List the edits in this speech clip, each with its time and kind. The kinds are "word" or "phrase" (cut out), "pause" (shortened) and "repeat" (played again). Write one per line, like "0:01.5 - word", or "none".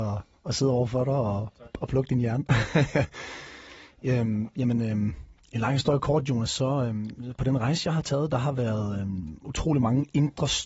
none